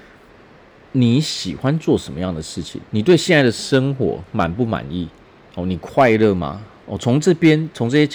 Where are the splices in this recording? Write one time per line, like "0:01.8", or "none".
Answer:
0:02.9